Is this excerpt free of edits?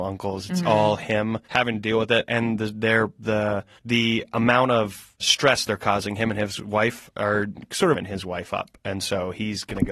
no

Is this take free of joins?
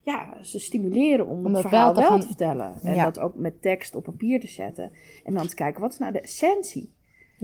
yes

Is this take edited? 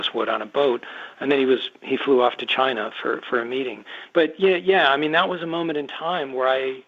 no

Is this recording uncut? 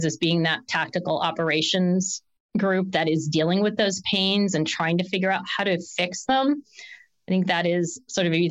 yes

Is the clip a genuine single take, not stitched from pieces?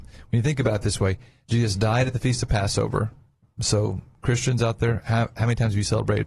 yes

